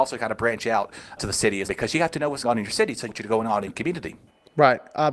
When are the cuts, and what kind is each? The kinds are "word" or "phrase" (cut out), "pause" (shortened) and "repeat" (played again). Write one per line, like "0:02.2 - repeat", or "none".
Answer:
0:01.2 - word
0:01.7 - word
0:02.4 - word
0:03.1 - word
0:03.7 - word